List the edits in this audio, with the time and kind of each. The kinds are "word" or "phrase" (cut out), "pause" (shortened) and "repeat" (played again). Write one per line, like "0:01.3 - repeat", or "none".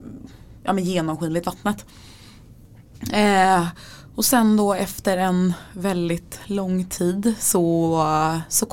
none